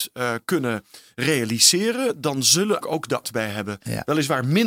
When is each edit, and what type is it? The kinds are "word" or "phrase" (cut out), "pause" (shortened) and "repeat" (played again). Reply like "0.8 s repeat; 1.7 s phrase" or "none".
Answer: 2.8 s word; 3.2 s phrase